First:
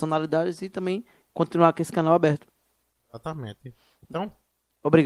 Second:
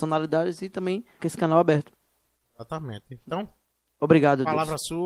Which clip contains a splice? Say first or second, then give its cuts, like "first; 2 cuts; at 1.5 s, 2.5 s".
second; 2 cuts; at 1.2 s, 3.2 s